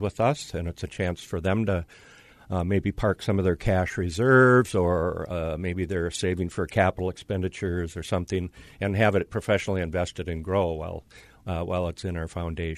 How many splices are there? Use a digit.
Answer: 0